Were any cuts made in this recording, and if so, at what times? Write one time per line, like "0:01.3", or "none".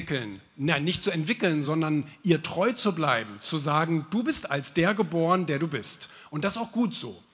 none